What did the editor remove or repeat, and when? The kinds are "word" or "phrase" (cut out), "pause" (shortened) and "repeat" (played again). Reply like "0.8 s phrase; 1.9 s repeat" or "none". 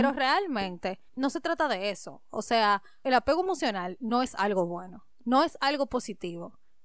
1.1 s pause